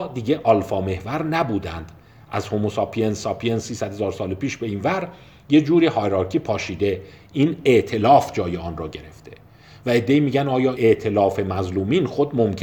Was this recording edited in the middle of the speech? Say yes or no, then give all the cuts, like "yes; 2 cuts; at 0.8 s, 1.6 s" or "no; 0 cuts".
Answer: yes; 1 cut; at 10.7 s